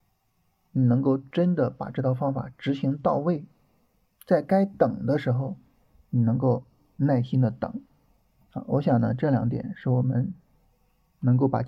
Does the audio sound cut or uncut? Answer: uncut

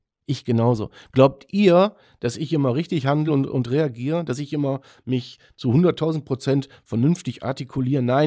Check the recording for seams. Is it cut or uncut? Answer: uncut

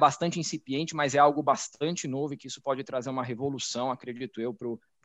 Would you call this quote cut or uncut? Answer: uncut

